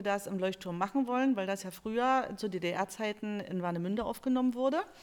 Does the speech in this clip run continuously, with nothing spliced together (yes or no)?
yes